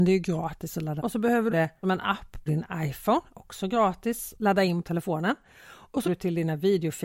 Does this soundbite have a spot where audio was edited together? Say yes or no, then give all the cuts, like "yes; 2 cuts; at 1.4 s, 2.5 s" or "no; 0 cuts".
yes; 7 cuts; at 1.0 s, 1.5 s, 1.8 s, 2.5 s, 4.3 s, 4.8 s, 6.0 s